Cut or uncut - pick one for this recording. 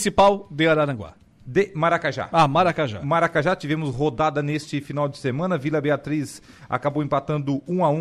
uncut